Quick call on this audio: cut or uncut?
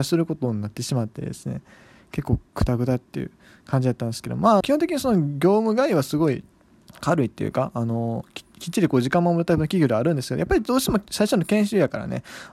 cut